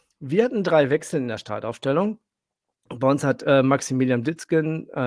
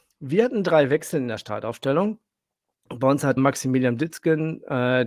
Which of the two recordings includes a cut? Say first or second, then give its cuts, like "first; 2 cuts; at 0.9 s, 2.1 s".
second; 1 cut; at 3.4 s